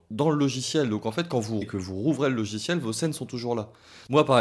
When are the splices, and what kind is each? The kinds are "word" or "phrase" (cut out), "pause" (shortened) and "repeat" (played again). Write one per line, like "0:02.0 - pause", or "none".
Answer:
0:01.6 - word